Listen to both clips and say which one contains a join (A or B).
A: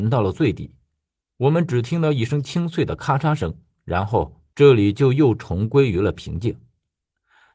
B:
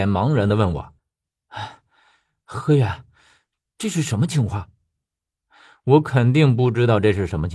B